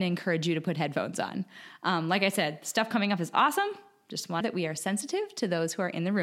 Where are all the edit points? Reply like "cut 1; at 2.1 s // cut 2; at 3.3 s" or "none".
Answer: cut 1; at 4.4 s

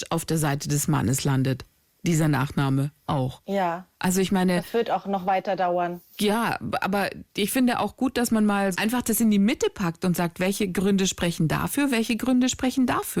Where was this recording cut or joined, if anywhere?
cut 1; at 3.1 s // cut 2; at 8.7 s

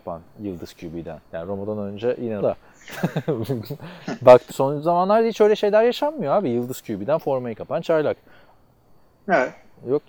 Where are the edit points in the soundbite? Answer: cut 1; at 1.2 s // cut 2; at 2.4 s // cut 3; at 4.5 s

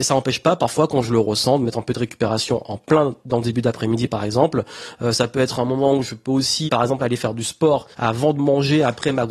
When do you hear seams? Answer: cut 1; at 6.7 s // cut 2; at 7.9 s

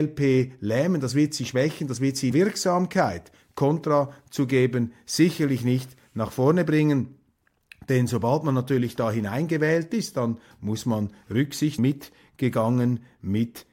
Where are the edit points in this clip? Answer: cut 1; at 2.3 s // cut 2; at 11.8 s

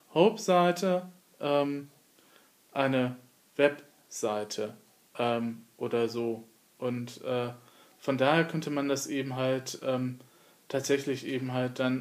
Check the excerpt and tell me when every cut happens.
none

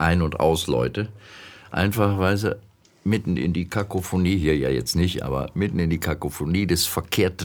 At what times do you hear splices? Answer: none

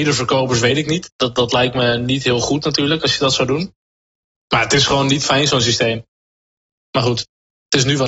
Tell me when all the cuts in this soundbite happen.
none

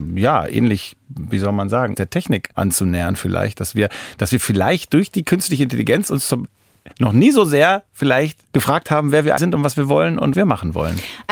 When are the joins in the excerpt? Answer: cut 1; at 1.9 s // cut 2; at 2.5 s // cut 3; at 6.9 s // cut 4; at 8.5 s // cut 5; at 9.4 s // cut 6; at 10.3 s

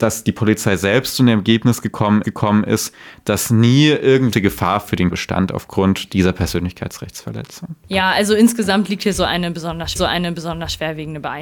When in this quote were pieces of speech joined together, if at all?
cut 1; at 2.2 s // cut 2; at 4.3 s // cut 3; at 5.1 s // cut 4; at 7.8 s // cut 5; at 10.0 s

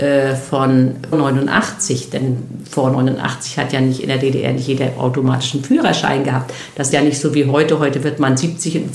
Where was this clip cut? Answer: cut 1; at 1.1 s // cut 2; at 6.9 s

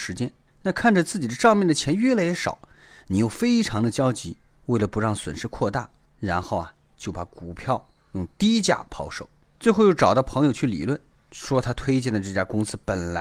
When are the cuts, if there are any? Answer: none

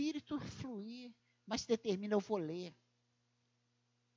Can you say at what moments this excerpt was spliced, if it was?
none

